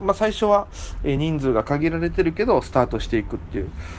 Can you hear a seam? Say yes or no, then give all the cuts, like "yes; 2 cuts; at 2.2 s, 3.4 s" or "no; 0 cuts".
no; 0 cuts